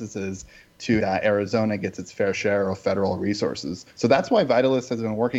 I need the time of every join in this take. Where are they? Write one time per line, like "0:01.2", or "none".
0:01.0